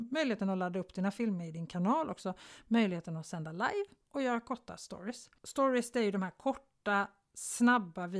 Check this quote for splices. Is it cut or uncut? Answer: uncut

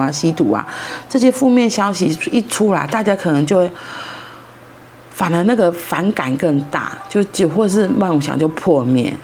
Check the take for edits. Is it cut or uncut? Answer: uncut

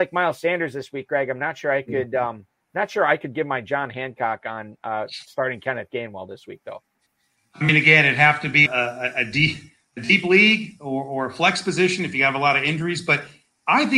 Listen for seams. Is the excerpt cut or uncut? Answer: cut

